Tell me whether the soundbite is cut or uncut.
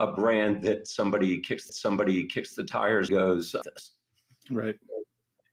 cut